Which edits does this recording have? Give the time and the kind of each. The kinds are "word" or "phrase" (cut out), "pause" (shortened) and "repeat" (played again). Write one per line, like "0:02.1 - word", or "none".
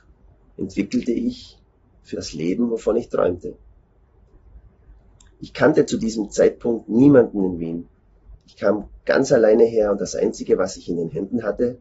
0:02.1 - word